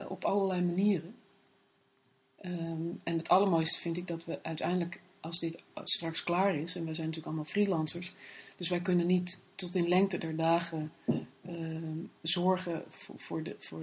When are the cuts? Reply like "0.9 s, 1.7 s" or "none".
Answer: none

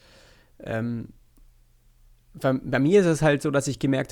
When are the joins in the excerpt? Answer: none

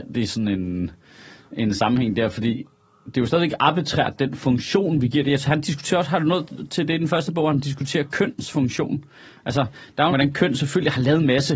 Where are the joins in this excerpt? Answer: 10.1 s

